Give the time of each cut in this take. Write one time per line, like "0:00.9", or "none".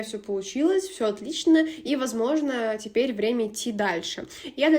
none